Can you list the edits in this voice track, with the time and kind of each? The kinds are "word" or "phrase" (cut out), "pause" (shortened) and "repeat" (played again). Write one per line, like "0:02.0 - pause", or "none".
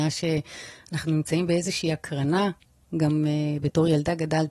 none